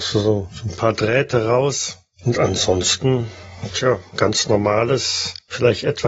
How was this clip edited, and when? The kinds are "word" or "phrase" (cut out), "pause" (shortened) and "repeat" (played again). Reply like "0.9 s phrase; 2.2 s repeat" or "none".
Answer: none